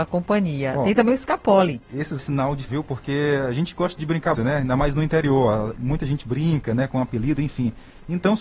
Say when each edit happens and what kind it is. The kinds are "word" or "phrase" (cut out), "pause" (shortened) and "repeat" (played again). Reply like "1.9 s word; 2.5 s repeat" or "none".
2.2 s phrase; 2.7 s word; 4.3 s word